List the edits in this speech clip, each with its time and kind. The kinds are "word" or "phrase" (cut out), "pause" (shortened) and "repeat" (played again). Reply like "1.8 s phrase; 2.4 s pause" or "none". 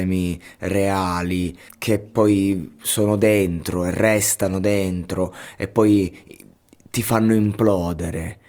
1.7 s word